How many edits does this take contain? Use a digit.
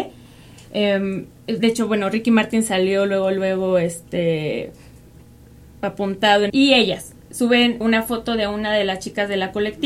2